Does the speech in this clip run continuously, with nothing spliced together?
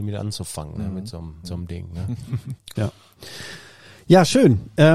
no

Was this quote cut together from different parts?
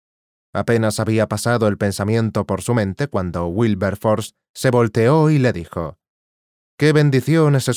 no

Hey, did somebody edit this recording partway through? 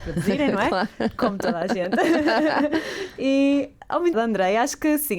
yes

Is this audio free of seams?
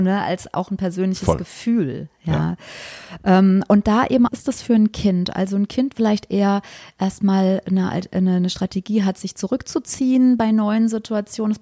no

